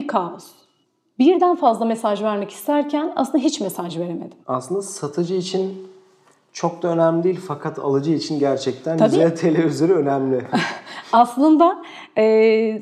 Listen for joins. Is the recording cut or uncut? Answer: cut